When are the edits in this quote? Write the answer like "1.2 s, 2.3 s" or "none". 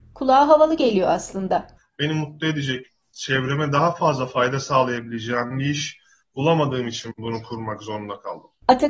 none